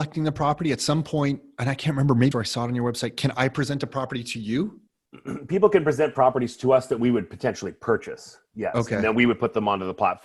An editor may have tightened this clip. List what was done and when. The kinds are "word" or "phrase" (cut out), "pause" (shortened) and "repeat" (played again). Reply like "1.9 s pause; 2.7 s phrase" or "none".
2.3 s phrase